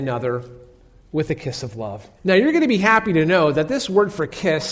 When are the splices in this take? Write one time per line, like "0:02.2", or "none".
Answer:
0:02.2